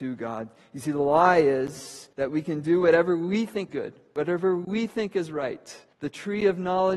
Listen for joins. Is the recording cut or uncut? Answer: cut